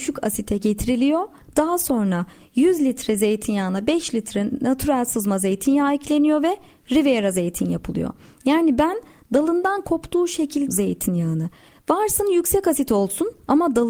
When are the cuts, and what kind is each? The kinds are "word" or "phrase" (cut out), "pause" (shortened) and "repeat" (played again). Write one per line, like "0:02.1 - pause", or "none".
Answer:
0:10.7 - phrase

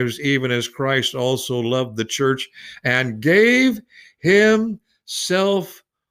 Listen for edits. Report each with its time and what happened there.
none

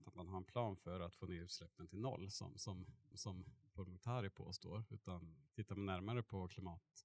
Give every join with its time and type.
0:03.1 - repeat
0:05.5 - pause

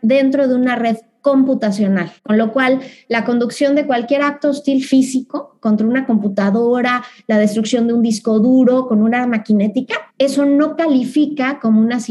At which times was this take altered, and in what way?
0:02.2 - pause
0:10.1 - pause

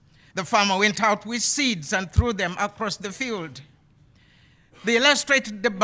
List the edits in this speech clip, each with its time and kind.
none

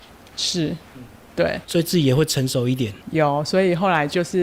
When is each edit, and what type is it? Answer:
0:01.6 - pause
0:03.0 - pause

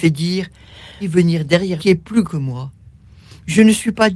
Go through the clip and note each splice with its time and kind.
0:01.0 - word
0:01.8 - phrase
0:02.2 - word

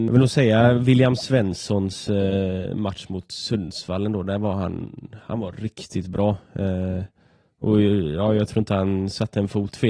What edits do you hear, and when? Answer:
none

